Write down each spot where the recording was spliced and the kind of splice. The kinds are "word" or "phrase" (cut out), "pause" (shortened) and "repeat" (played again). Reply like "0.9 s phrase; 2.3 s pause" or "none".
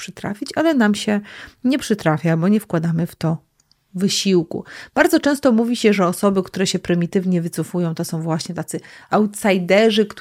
none